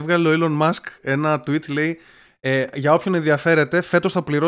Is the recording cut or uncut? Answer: uncut